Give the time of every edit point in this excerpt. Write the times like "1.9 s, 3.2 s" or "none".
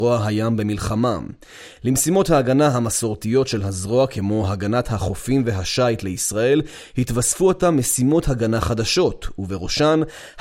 none